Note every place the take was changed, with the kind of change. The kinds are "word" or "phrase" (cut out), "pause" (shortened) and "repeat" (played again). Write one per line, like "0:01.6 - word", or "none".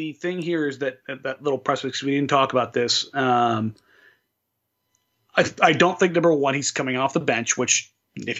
none